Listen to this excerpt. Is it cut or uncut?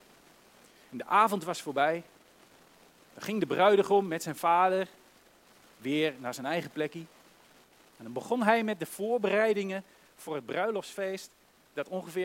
uncut